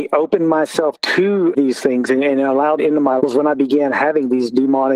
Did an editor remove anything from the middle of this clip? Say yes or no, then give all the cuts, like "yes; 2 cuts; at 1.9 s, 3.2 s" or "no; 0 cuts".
yes; 3 cuts; at 0.9 s, 2.8 s, 3.2 s